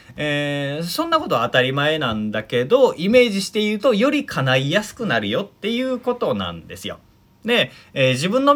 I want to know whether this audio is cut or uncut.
uncut